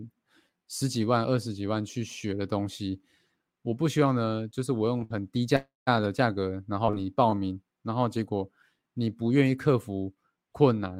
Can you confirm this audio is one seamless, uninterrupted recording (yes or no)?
yes